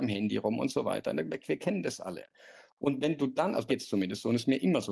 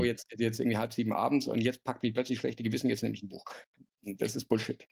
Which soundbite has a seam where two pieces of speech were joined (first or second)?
first